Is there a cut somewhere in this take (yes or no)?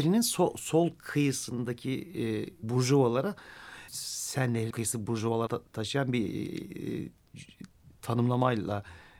yes